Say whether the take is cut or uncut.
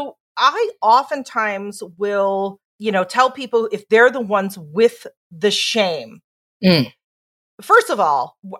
uncut